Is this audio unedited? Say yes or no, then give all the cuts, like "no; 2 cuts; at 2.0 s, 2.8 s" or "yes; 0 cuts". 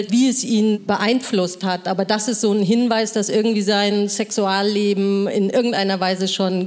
yes; 0 cuts